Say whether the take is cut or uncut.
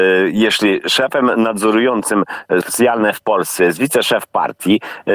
cut